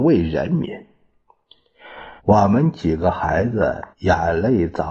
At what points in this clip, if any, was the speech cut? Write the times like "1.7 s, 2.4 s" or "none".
2.2 s, 3.9 s